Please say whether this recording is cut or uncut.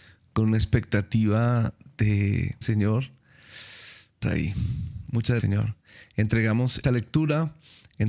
cut